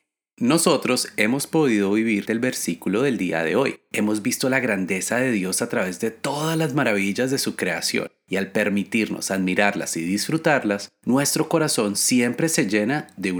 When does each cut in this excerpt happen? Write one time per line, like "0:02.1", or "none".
0:02.3